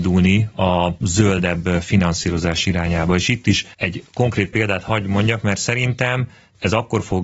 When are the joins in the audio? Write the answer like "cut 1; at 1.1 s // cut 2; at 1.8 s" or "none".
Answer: none